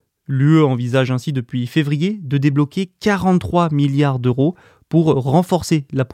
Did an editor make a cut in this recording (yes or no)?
no